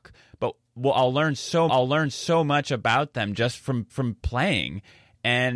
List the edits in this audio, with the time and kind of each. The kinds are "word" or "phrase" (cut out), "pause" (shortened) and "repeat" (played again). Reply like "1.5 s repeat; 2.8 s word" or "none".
1.7 s repeat; 3.9 s repeat

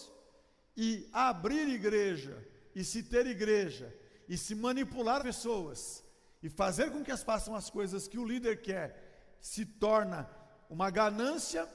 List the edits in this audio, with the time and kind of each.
5.2 s word; 7.2 s word

